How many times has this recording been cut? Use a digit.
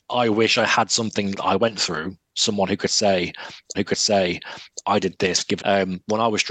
3